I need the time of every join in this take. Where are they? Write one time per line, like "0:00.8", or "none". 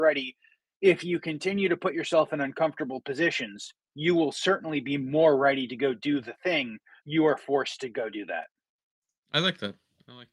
0:07.0